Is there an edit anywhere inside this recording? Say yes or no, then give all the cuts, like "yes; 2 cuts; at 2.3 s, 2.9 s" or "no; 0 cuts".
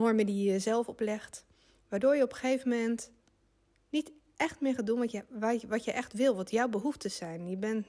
no; 0 cuts